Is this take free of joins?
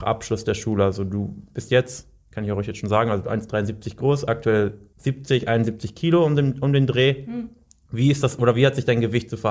yes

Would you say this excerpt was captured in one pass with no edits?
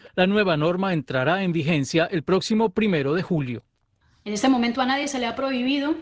yes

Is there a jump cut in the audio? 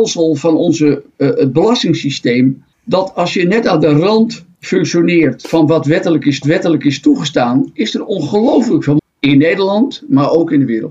yes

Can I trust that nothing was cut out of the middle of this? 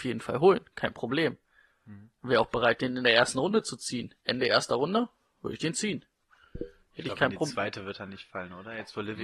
yes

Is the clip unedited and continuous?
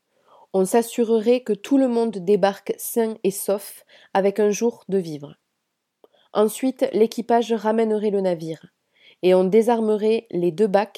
yes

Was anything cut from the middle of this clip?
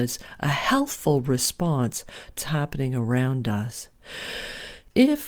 yes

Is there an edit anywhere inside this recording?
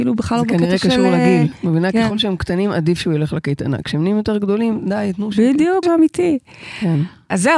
yes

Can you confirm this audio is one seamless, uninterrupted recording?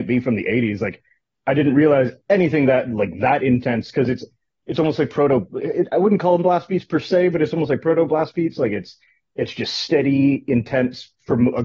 yes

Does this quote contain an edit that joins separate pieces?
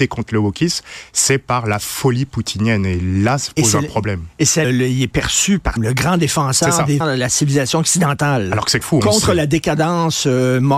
yes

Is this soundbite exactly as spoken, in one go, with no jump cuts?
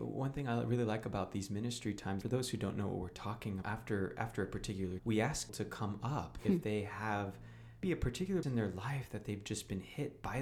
no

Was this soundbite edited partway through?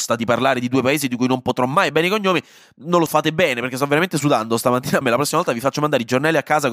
yes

